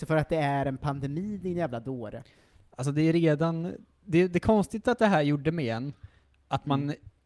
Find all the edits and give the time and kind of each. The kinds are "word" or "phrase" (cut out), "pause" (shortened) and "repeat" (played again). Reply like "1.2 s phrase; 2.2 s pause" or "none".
none